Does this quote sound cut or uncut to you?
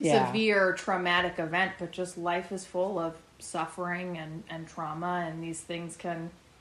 uncut